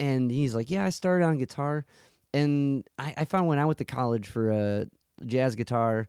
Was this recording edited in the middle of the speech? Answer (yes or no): no